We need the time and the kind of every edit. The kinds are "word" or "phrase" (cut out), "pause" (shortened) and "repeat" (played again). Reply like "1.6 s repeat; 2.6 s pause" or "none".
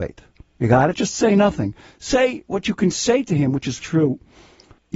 3.8 s word